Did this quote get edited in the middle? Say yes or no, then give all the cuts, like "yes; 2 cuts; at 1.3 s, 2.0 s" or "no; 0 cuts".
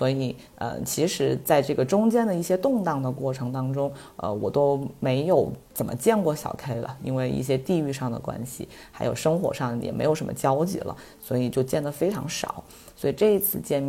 no; 0 cuts